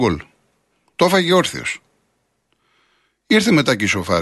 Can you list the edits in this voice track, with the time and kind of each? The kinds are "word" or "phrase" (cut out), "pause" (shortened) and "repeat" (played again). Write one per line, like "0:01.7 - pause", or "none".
none